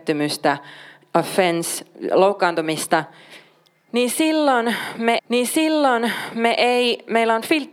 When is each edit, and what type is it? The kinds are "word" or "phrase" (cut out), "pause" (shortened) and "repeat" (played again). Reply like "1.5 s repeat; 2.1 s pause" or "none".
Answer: 5.2 s repeat